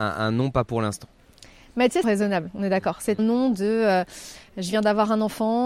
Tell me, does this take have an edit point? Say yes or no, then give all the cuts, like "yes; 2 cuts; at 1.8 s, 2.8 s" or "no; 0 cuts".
yes; 2 cuts; at 2.0 s, 3.2 s